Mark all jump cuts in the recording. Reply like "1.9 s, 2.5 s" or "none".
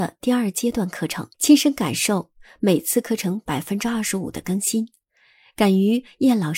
1.3 s